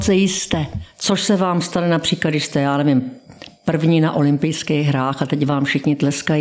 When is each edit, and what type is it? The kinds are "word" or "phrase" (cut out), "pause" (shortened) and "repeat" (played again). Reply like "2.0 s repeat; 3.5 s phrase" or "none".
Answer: none